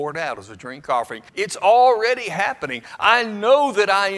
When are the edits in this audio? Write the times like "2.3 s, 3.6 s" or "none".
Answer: 1.3 s